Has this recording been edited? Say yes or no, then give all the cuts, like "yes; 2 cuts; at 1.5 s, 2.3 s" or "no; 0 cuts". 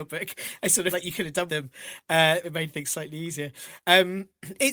yes; 3 cuts; at 0.9 s, 1.5 s, 2.4 s